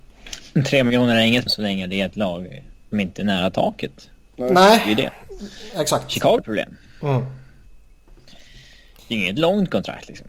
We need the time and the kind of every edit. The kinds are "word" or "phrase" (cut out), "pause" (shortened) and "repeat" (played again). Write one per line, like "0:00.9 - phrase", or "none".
0:01.5 - word
0:02.9 - word
0:06.4 - word